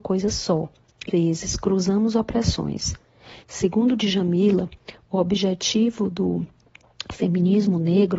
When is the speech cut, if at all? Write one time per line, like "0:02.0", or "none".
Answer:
0:01.1
0:03.4